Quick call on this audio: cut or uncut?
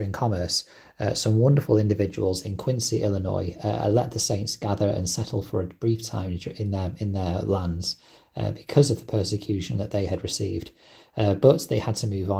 uncut